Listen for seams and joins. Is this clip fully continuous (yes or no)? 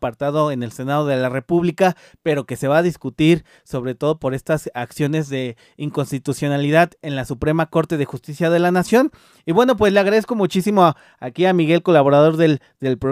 yes